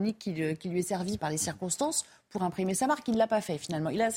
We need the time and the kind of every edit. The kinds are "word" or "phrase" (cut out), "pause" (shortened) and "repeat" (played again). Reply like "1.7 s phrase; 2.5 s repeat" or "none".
1.2 s word

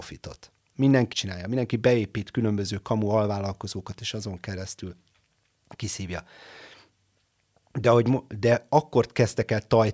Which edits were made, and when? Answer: 1.1 s word

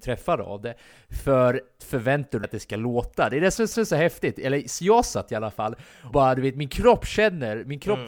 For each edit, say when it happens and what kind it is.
1.8 s word; 2.4 s word; 3.7 s repeat; 6.1 s word

